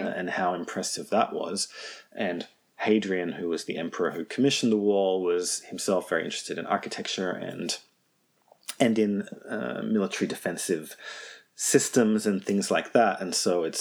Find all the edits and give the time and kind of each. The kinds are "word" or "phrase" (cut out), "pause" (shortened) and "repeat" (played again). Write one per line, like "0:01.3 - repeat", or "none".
none